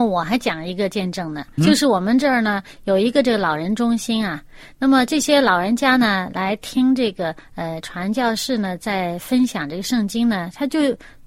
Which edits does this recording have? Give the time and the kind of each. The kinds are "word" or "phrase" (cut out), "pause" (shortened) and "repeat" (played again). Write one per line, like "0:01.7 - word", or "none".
0:01.6 - word